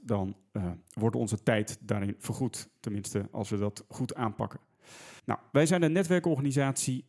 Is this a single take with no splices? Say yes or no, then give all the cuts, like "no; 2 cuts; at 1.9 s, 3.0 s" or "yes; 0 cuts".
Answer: no; 1 cut; at 5.2 s